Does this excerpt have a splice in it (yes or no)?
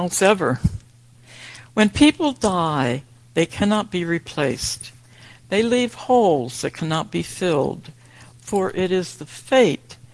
no